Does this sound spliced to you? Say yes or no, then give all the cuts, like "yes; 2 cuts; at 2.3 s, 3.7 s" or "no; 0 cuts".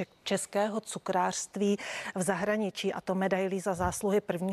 no; 0 cuts